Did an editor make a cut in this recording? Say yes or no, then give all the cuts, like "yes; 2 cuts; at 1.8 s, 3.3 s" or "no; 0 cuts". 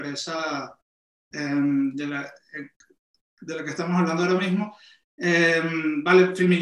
no; 0 cuts